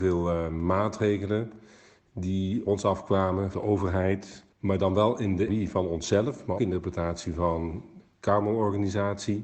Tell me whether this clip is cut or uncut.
cut